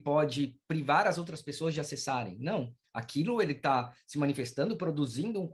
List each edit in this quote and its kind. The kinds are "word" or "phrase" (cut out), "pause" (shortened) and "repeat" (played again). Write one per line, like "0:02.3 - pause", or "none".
none